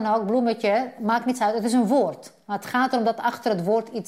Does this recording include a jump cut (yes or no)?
no